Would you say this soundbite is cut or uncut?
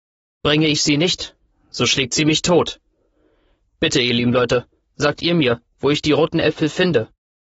uncut